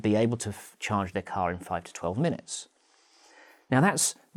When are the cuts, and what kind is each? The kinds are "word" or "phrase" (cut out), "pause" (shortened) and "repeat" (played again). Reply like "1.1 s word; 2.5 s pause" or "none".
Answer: none